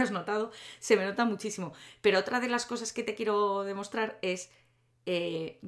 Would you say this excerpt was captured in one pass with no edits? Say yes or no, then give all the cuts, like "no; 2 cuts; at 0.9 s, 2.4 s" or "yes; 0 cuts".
yes; 0 cuts